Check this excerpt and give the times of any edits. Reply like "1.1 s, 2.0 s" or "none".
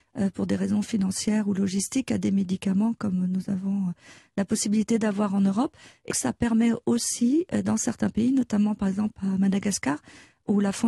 6.1 s